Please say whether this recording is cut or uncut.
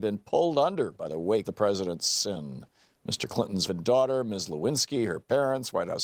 cut